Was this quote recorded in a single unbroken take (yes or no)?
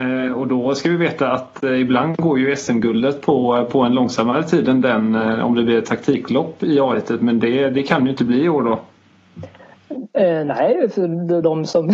yes